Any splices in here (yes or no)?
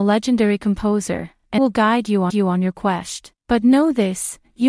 yes